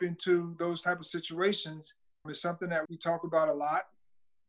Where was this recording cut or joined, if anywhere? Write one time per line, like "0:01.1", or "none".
0:02.3
0:02.9